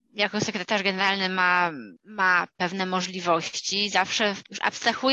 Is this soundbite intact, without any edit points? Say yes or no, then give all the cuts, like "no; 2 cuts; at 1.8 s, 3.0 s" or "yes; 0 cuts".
no; 1 cut; at 2.0 s